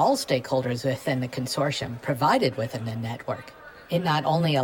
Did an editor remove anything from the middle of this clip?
yes; 1 cut; at 2.0 s

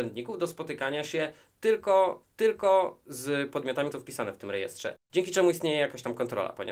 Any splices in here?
yes; 3 cuts; at 2.2 s, 3.9 s, 5.0 s

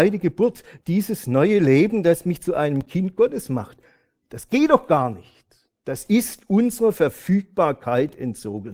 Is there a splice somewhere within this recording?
no; 0 cuts

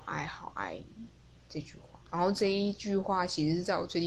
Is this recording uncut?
no; 1 cut; at 2.0 s

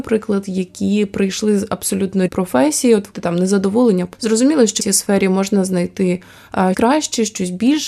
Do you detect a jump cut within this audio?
yes; 5 cuts; at 2.3 s, 3.1 s, 4.1 s, 4.8 s, 6.7 s

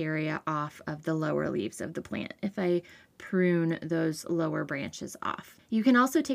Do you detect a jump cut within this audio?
no; 0 cuts

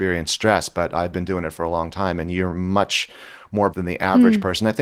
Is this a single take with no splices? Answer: no; 1 cut; at 3.7 s

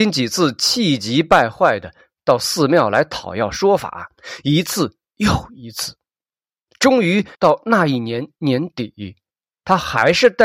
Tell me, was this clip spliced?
yes; 1 cut; at 7.3 s

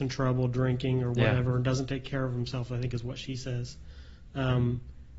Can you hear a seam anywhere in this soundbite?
no; 0 cuts

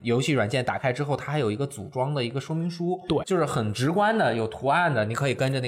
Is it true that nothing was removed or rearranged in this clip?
yes; 0 cuts

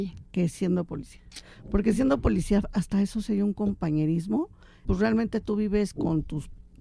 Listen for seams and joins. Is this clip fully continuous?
no; 1 cut; at 4.8 s

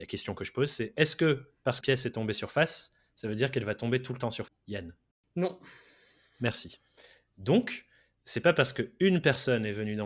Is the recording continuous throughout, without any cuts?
no; 2 cuts; at 1.8 s, 4.5 s

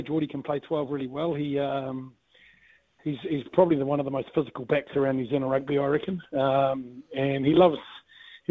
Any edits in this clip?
no; 0 cuts

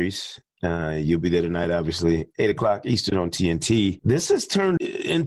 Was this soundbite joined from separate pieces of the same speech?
no; 0 cuts

